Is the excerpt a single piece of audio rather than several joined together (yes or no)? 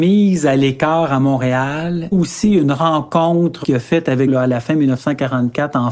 no